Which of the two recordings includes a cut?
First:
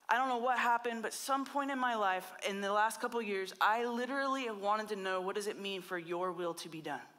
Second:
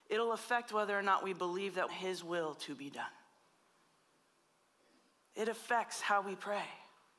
second; 1 cut; at 1.9 s

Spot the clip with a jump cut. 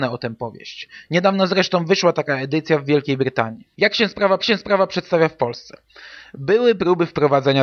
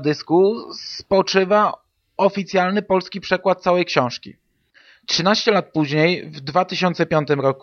first; 2 cuts; at 3.7 s, 4.4 s

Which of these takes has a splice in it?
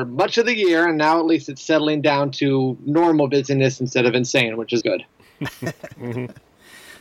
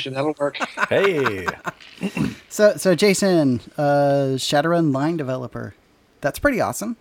first; 1 cut; at 4.8 s

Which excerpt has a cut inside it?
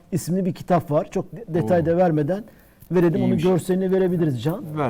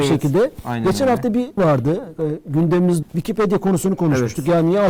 second; 2 cuts; at 1.6 s, 3.0 s

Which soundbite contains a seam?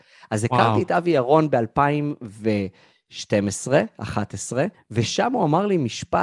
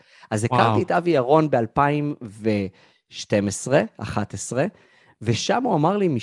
first; 1 cut; at 4.7 s

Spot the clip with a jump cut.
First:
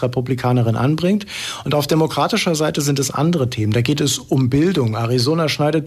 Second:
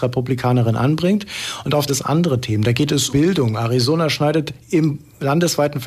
second; 2 cuts; at 1.9 s, 3.1 s

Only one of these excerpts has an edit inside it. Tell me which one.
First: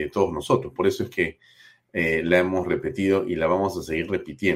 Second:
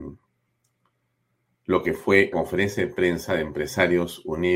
second; 1 cut; at 2.3 s

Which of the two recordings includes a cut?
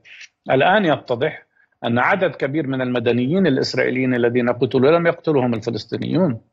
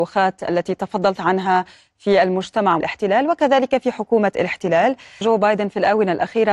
second; 3 cuts; at 1.2 s, 2.8 s, 5.2 s

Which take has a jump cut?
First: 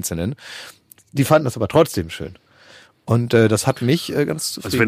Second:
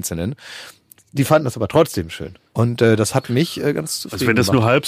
second; 1 cut; at 2.5 s

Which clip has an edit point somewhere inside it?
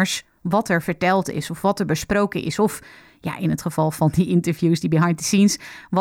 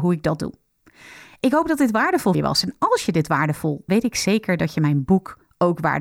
second; 2 cuts; at 2.3 s, 3.9 s

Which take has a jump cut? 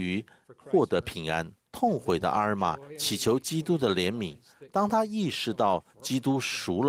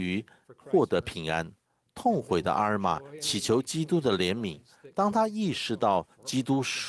first; 1 cut; at 1.7 s

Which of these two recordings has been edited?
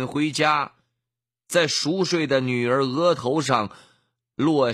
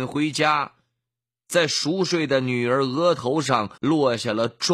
second; 1 cut; at 3.8 s

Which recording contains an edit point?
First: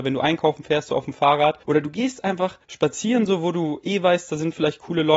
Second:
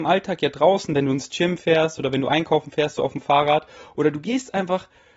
first; 2 cuts; at 1.6 s, 2.6 s

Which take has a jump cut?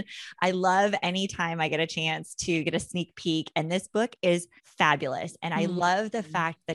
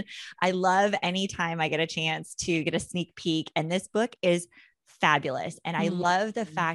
first; 1 cut; at 4.6 s

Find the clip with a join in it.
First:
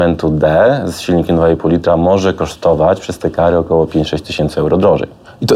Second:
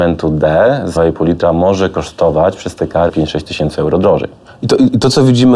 second; 2 cuts; at 1.0 s, 3.1 s

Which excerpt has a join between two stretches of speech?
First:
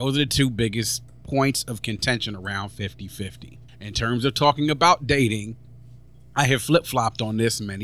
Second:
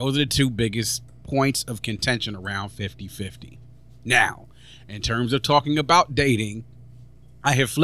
first; 1 cut; at 3.7 s

